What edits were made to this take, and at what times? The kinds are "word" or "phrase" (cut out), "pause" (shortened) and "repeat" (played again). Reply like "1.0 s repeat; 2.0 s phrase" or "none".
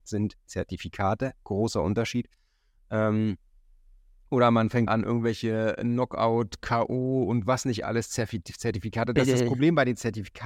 4.9 s word